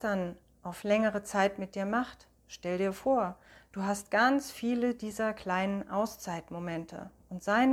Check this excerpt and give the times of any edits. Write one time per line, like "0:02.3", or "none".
none